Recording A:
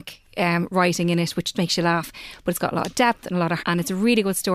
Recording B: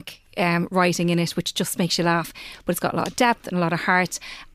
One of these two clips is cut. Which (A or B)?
A